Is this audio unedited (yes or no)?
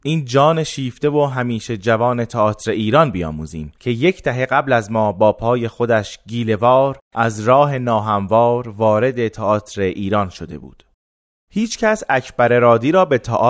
yes